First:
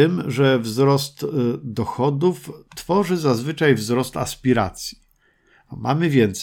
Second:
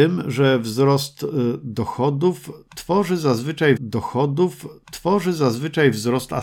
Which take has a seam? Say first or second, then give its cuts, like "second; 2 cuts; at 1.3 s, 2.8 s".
second; 1 cut; at 3.8 s